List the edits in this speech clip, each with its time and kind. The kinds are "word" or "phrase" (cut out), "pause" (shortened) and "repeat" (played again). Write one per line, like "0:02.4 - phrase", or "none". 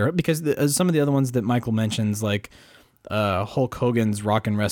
none